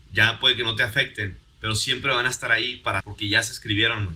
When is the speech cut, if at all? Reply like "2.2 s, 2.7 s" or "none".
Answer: 3.0 s